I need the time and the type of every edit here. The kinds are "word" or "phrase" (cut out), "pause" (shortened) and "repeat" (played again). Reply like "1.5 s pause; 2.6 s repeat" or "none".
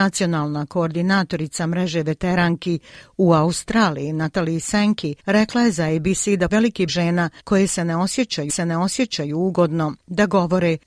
5.2 s pause; 6.5 s word; 6.9 s word; 7.4 s pause; 8.5 s repeat